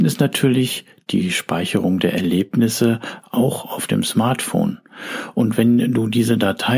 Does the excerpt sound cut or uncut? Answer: uncut